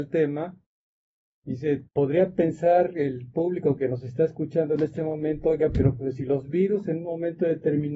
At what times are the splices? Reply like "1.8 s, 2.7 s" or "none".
1.9 s